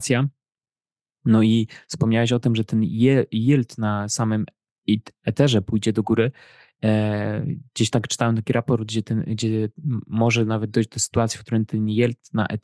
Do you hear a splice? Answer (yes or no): no